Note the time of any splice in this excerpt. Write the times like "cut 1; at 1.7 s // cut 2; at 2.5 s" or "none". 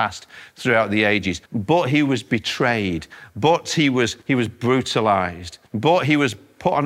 cut 1; at 1.5 s // cut 2; at 4.2 s // cut 3; at 5.7 s